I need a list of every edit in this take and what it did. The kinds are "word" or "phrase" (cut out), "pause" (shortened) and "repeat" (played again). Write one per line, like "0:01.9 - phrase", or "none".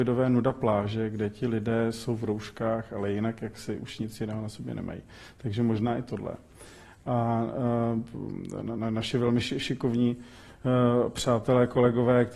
none